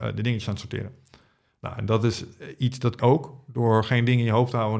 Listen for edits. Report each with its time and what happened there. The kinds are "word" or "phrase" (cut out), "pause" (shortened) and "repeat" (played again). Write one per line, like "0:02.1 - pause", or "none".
0:03.0 - word